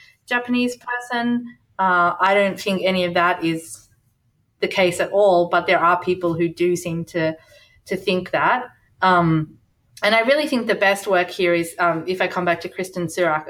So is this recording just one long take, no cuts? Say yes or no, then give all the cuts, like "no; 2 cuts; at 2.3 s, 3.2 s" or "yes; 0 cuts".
yes; 0 cuts